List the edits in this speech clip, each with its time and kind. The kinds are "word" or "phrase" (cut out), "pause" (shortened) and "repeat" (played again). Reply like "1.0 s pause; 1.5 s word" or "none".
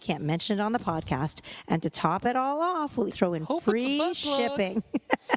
3.1 s word